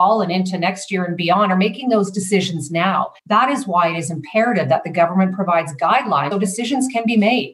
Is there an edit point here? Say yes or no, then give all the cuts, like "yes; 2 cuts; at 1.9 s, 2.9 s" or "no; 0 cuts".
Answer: yes; 2 cuts; at 3.2 s, 6.3 s